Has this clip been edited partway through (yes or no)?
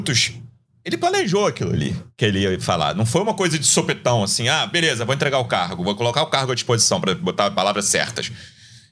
no